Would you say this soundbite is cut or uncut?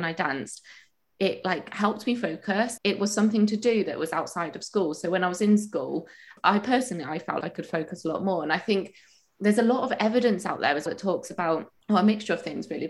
cut